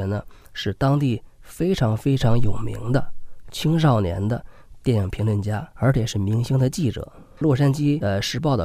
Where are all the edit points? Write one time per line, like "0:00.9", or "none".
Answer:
0:05.7